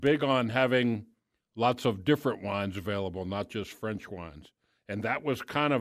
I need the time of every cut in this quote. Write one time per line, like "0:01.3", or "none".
none